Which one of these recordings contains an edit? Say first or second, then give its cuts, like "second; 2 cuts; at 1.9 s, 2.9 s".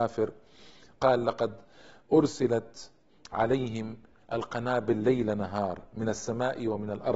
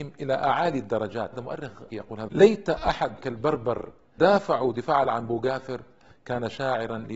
second; 6 cuts; at 1.3 s, 1.9 s, 2.3 s, 3.2 s, 4.2 s, 5.0 s